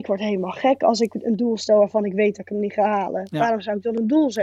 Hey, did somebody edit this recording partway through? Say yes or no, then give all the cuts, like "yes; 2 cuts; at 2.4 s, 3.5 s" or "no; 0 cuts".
no; 0 cuts